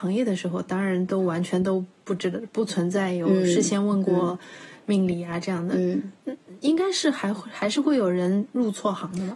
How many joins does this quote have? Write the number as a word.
one